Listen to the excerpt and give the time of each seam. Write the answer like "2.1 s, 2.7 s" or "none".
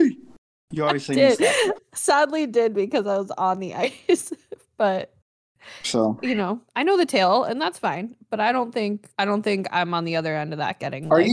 6.7 s, 9.1 s